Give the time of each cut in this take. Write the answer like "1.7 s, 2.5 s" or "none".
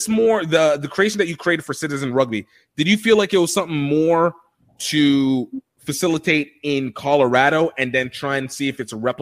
none